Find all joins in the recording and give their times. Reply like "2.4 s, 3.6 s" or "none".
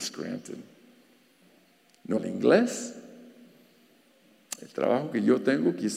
2.2 s